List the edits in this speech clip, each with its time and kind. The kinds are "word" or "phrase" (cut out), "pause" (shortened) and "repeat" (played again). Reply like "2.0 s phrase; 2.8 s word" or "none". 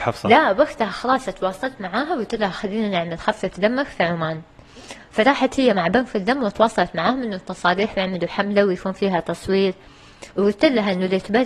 10.3 s pause